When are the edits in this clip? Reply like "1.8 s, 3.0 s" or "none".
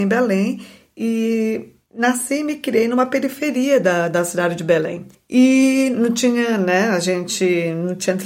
5.1 s